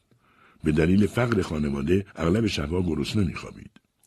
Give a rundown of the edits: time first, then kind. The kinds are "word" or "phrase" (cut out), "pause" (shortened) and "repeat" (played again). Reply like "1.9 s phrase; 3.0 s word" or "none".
2.1 s pause